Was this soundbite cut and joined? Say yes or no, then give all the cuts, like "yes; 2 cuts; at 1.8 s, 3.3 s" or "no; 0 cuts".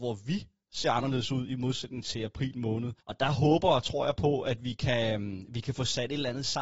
yes; 1 cut; at 3.0 s